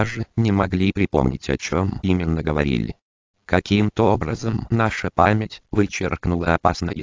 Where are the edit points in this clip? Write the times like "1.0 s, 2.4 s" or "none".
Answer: none